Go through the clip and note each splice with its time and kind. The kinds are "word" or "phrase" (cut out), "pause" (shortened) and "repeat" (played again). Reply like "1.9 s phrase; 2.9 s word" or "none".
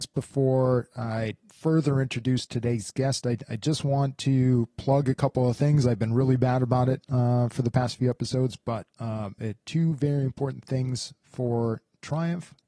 none

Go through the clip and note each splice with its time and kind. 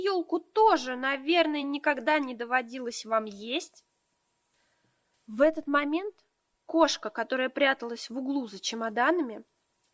none

